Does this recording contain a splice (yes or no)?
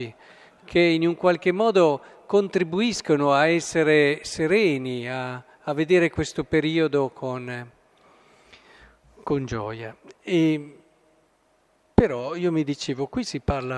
no